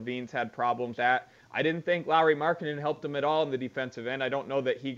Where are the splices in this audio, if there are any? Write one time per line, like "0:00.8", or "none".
0:01.0